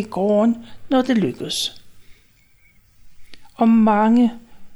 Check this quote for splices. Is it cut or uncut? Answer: uncut